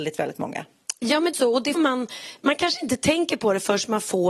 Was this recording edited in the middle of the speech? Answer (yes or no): yes